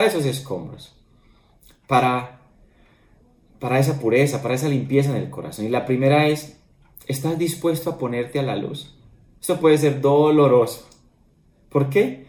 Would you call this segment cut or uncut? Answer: uncut